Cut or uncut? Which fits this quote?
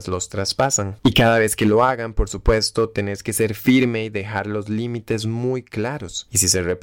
cut